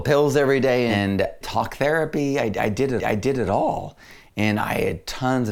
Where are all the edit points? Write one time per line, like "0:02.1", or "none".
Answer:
0:01.4
0:03.0